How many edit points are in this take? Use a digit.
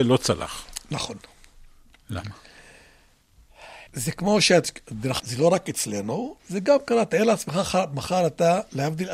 3